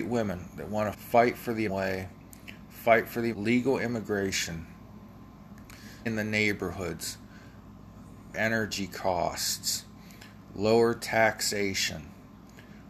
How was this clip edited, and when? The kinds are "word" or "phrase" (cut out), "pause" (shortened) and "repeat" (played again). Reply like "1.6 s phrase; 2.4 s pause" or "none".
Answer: 0.9 s word; 1.7 s word; 3.3 s phrase; 6.1 s word; 8.3 s word